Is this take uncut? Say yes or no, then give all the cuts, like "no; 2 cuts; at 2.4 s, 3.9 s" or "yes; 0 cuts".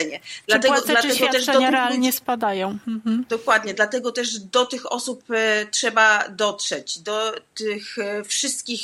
yes; 0 cuts